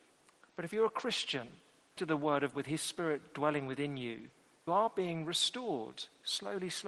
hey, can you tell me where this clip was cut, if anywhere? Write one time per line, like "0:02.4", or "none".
0:02.0
0:02.5
0:04.7